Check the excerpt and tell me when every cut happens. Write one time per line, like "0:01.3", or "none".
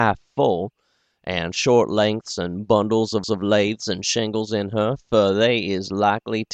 0:03.2